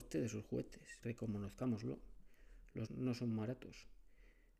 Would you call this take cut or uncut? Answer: cut